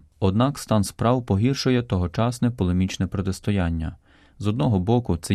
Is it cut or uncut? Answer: uncut